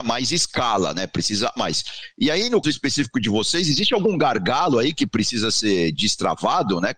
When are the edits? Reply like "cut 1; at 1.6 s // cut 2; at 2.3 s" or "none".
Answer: cut 1; at 1.6 s // cut 2; at 2.6 s